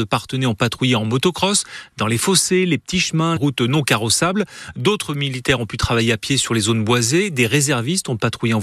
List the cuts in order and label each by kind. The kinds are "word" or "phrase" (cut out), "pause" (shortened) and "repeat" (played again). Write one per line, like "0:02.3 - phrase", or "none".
0:03.4 - word